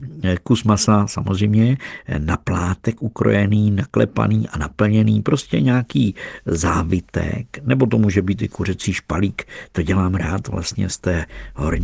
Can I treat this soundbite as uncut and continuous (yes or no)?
yes